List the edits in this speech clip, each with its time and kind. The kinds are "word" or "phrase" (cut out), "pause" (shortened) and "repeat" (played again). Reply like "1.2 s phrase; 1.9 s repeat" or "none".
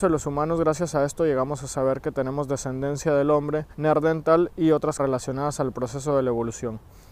3.7 s pause; 5.0 s word